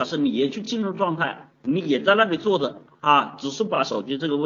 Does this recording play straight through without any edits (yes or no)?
no